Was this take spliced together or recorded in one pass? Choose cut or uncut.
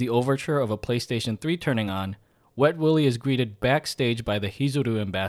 uncut